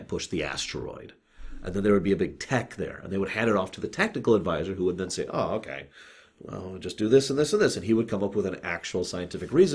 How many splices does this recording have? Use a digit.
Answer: 0